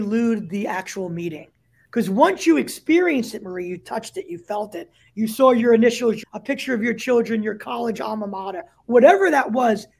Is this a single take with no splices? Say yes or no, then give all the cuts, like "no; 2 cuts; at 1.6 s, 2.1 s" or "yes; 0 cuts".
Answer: no; 1 cut; at 6.2 s